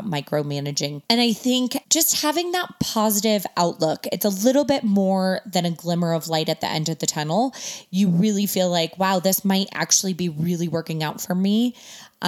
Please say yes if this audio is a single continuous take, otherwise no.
no